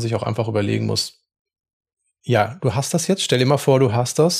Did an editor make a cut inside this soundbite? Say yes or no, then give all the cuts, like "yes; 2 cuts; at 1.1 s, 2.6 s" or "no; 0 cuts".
no; 0 cuts